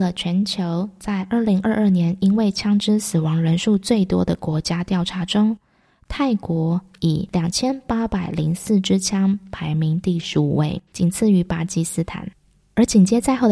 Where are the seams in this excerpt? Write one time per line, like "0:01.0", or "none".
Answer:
0:10.9